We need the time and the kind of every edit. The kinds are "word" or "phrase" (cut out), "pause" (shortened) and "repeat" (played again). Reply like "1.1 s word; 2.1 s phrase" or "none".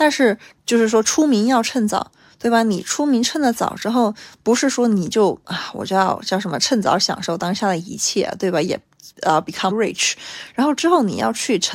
9.1 s pause; 9.7 s phrase